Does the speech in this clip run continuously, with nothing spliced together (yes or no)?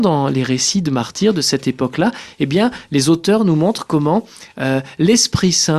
yes